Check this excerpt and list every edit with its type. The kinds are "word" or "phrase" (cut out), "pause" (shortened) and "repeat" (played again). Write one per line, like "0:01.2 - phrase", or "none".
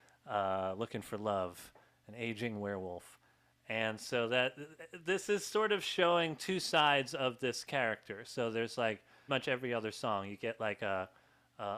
0:09.3 - word